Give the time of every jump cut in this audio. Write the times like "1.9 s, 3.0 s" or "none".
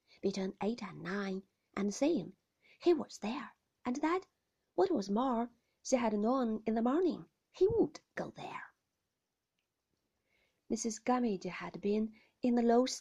none